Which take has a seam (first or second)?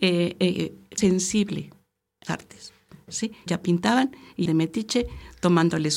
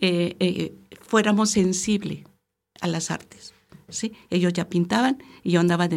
first